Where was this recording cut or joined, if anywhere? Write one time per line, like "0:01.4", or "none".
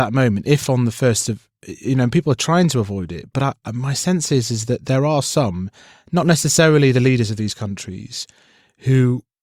none